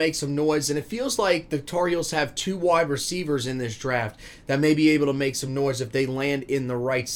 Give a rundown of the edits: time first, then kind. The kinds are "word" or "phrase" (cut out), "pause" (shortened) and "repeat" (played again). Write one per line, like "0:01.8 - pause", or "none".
none